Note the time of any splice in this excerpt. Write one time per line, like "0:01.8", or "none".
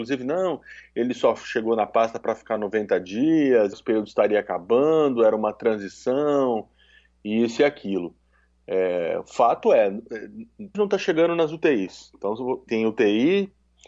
0:03.7
0:10.7
0:12.7